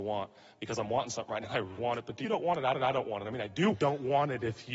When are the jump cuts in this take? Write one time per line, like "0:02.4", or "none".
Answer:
0:01.4
0:01.8
0:02.2
0:02.7
0:03.7